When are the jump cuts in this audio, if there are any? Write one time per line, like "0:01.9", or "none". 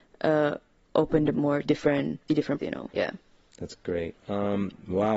0:01.3
0:01.6
0:02.3
0:02.6
0:02.9
0:04.1